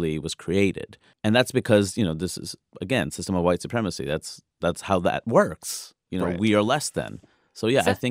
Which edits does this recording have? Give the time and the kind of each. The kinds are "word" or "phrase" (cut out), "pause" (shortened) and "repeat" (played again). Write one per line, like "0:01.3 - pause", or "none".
0:01.1 - pause